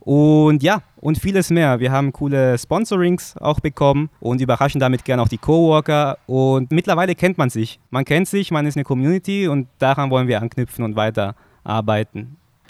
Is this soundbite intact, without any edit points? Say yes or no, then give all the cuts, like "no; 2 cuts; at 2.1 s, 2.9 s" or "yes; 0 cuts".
no; 3 cuts; at 4.2 s, 6.7 s, 8.7 s